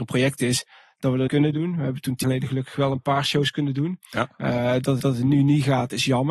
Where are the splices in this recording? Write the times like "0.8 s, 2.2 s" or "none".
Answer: 1.3 s, 2.2 s, 5.0 s